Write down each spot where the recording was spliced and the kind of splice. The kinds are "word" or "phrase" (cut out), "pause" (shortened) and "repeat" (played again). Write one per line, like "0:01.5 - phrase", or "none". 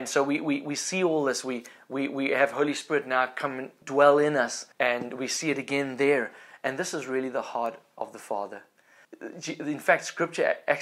0:04.7 - pause